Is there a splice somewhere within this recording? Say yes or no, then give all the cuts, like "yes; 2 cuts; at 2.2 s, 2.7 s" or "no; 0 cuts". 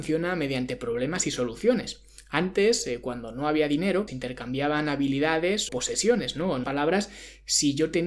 yes; 3 cuts; at 4.1 s, 5.7 s, 6.6 s